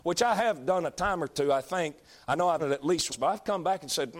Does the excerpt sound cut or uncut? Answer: cut